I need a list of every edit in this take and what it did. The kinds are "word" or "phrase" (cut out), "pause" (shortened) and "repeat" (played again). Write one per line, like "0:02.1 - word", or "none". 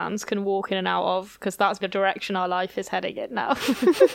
0:01.8 - word